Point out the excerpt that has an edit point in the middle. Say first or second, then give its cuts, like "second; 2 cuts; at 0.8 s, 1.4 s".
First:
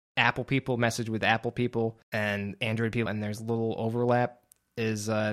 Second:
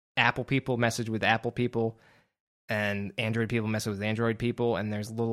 first; 2 cuts; at 2.0 s, 3.1 s